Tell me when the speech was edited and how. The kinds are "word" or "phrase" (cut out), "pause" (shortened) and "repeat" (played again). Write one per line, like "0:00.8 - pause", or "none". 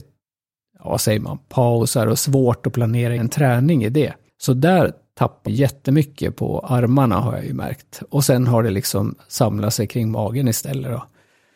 0:03.2 - word
0:04.3 - pause
0:05.5 - word